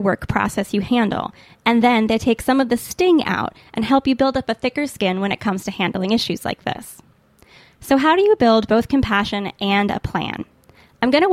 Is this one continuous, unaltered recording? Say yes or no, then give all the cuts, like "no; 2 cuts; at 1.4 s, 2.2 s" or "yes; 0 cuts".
yes; 0 cuts